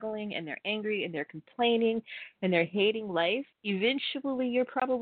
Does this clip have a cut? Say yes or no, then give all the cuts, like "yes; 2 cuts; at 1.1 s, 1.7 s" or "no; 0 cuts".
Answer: yes; 1 cut; at 3.5 s